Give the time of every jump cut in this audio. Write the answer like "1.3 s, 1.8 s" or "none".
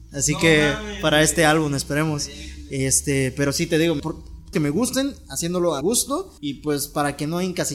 4.0 s, 4.5 s, 5.8 s, 6.4 s

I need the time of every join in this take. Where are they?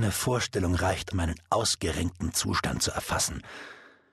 1.1 s

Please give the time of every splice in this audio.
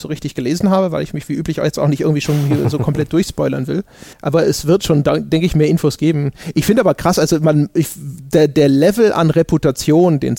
4.1 s

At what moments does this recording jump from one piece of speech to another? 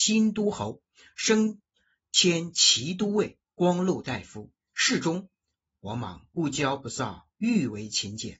none

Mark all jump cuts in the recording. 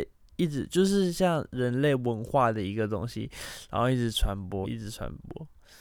4.6 s

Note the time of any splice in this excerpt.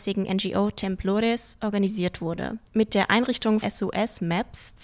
3.6 s

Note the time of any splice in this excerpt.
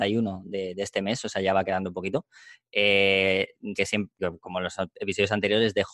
3.8 s, 4.2 s

